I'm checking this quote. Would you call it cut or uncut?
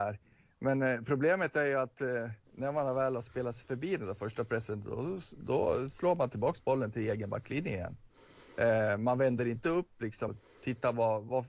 cut